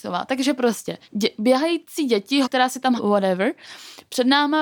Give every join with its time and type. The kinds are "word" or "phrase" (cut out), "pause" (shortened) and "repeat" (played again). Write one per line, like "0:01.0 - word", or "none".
0:01.0 - pause
0:02.4 - word
0:03.0 - phrase